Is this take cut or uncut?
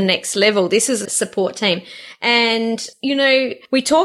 cut